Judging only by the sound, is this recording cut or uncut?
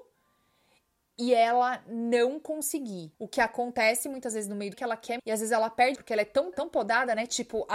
cut